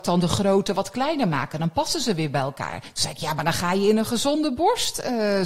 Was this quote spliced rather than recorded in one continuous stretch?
no; 0 cuts

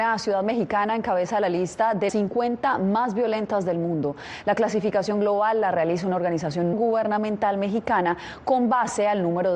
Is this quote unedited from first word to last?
no; 2 cuts; at 2.1 s, 6.7 s

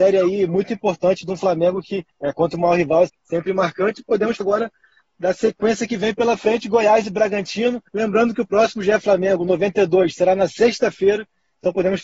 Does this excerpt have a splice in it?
yes; 4 cuts; at 2.1 s, 3.1 s, 4.4 s, 7.9 s

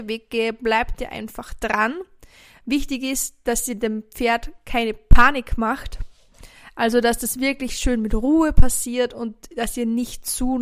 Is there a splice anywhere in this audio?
no; 0 cuts

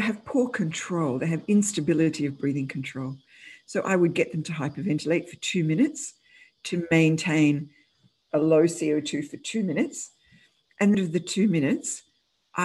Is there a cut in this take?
yes; 1 cut; at 10.9 s

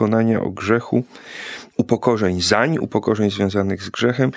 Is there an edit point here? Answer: no; 0 cuts

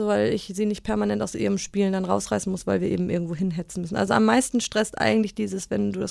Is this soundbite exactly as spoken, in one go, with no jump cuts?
yes; 0 cuts

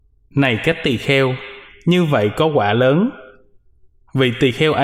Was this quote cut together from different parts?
no; 0 cuts

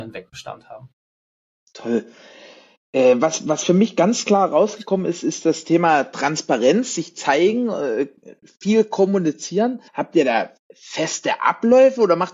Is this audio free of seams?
no; 1 cut; at 9.9 s

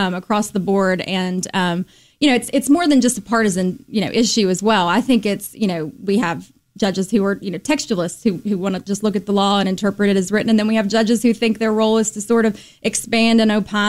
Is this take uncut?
yes; 0 cuts

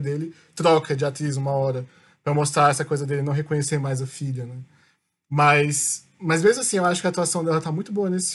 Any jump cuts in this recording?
no; 0 cuts

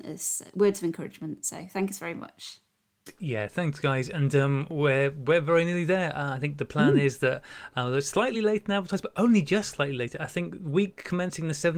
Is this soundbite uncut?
yes; 0 cuts

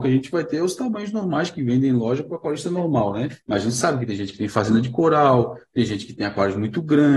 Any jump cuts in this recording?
yes; 1 cut; at 3.4 s

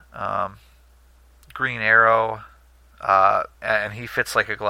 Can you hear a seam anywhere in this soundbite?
yes; 1 cut; at 3.5 s

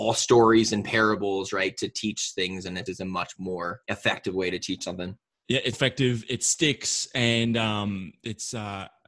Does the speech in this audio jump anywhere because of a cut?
yes; 3 cuts; at 2.9 s, 3.8 s, 5.7 s

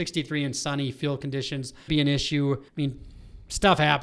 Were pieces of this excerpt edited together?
yes; 2 cuts; at 1.9 s, 2.7 s

